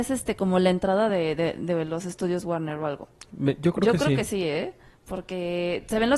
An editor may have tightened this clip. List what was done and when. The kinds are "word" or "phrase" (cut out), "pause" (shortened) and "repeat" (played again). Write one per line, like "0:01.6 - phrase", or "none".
none